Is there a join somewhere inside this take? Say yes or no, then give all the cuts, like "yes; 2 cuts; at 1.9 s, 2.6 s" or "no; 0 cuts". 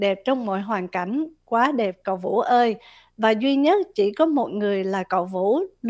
no; 0 cuts